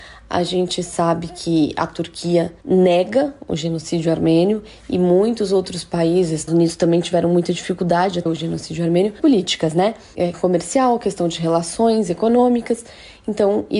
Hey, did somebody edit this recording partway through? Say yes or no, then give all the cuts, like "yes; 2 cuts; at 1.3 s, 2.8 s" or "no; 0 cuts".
yes; 5 cuts; at 2.6 s, 6.5 s, 8.3 s, 9.2 s, 10.3 s